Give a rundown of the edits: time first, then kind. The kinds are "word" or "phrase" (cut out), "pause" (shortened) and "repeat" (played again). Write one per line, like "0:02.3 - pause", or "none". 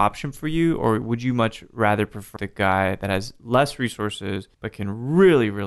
0:02.4 - word
0:04.5 - pause